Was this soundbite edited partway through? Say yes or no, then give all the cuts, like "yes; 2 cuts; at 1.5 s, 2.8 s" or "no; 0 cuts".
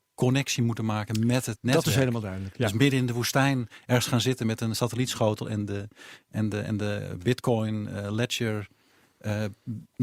no; 0 cuts